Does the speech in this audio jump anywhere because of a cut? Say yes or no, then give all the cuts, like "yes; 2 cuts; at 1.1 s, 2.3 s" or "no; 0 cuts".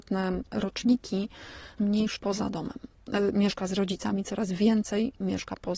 yes; 2 cuts; at 1.8 s, 2.2 s